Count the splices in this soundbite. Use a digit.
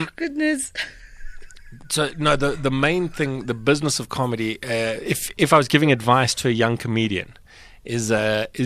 0